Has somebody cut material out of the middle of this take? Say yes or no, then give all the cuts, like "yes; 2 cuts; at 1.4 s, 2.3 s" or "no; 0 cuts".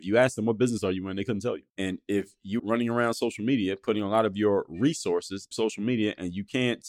yes; 3 cuts; at 1.7 s, 2.6 s, 5.5 s